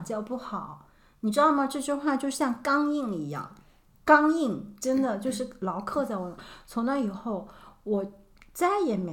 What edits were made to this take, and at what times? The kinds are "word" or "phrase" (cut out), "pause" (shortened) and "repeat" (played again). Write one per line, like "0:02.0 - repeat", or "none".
none